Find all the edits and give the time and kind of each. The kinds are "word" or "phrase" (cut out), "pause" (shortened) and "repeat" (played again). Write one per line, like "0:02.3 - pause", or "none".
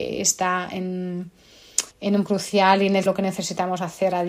0:01.9 - pause
0:02.3 - word
0:03.1 - phrase

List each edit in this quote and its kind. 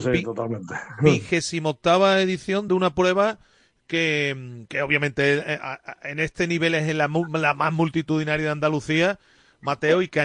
none

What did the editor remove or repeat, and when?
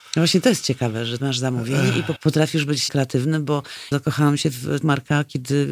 0:01.2 - word
0:02.2 - word
0:02.9 - word
0:03.9 - word
0:04.8 - word

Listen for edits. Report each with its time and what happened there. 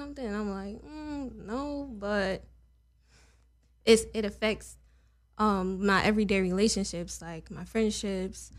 none

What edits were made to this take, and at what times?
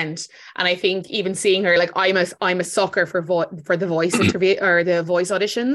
none

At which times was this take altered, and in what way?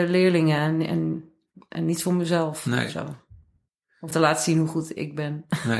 0:04.1 - word

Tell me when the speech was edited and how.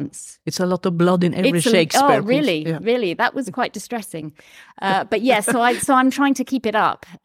none

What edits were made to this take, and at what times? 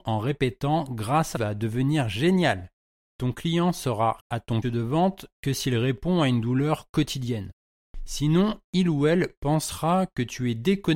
0:01.3 - phrase
0:04.2 - word
0:04.6 - word

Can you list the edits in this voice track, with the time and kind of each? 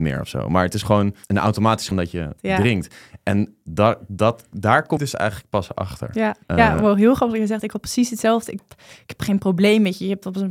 0:01.2 - pause
0:01.9 - phrase
0:02.4 - phrase
0:05.0 - phrase
0:06.4 - pause
0:08.6 - phrase

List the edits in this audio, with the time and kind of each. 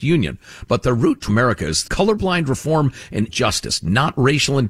0:01.3 - phrase
0:01.8 - word
0:03.3 - word

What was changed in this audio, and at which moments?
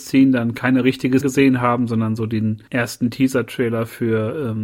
0:01.2 - word
0:02.7 - pause

